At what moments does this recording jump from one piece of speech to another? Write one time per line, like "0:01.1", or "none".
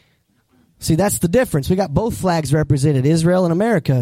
none